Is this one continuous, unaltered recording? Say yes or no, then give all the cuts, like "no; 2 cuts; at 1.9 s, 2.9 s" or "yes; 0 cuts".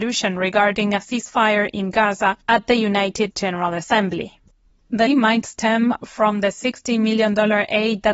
no; 3 cuts; at 2.4 s, 3.3 s, 5.1 s